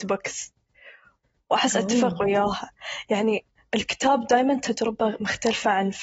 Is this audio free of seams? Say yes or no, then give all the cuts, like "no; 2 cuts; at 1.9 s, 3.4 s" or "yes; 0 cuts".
yes; 0 cuts